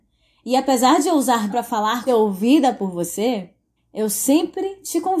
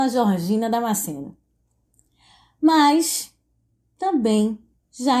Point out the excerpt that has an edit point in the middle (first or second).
first